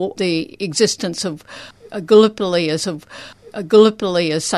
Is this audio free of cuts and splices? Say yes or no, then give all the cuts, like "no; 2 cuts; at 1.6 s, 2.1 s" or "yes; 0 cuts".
no; 1 cut; at 2.8 s